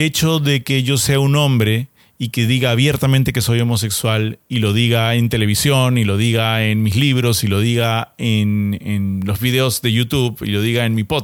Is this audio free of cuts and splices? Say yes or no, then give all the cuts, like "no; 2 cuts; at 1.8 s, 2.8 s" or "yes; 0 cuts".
yes; 0 cuts